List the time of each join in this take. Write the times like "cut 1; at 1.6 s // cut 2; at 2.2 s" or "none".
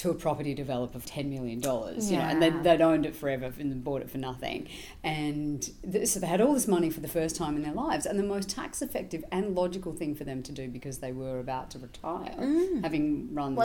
cut 1; at 1.0 s

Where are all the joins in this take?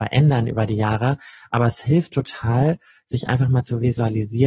none

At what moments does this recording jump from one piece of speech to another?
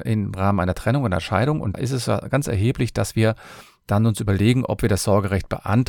cut 1; at 1.7 s

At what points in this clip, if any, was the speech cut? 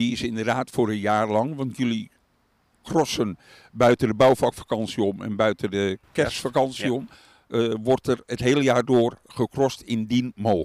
cut 1; at 6.0 s

